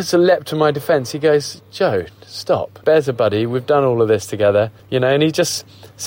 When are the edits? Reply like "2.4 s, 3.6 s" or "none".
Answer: 2.8 s, 4.8 s